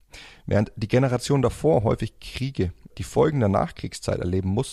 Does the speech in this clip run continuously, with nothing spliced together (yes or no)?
no